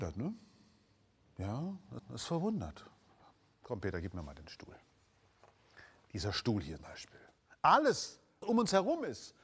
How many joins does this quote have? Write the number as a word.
three